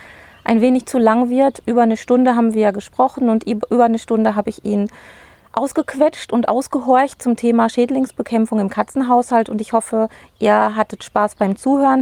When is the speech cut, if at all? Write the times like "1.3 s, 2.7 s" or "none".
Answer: none